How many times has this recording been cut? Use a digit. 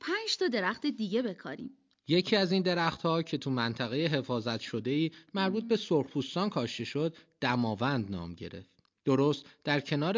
0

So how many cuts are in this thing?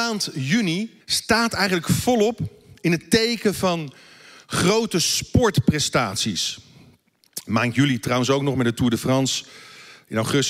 1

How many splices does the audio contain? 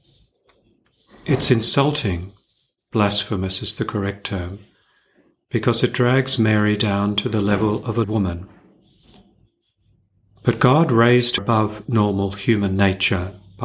2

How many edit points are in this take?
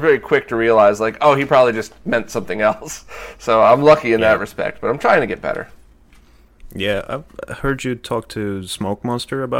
0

